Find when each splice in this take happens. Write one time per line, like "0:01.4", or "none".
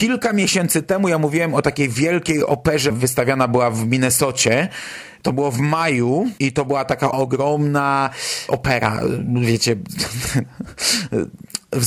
0:02.9
0:06.4
0:07.1
0:08.5